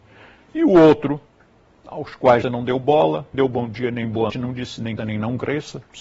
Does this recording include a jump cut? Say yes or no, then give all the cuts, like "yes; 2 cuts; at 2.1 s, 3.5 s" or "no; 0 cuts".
yes; 4 cuts; at 2.4 s, 3.3 s, 4.3 s, 5.0 s